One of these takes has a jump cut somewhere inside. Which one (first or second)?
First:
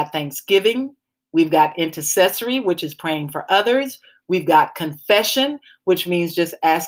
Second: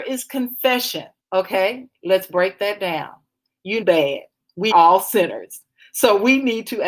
second